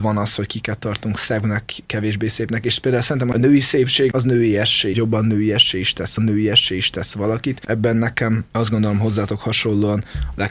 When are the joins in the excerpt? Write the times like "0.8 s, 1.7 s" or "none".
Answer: 4.1 s, 4.9 s, 6.2 s